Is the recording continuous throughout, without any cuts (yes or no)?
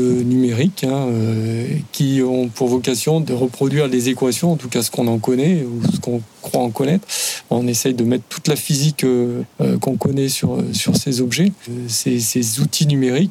yes